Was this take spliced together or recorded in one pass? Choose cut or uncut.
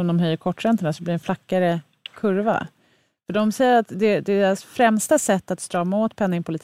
uncut